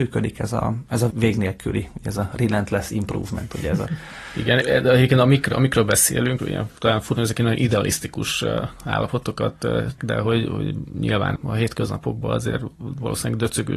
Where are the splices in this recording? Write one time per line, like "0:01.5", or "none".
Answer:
0:01.1
0:04.6
0:06.4
0:07.1
0:10.0
0:11.3